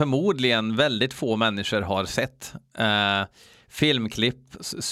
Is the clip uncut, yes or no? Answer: yes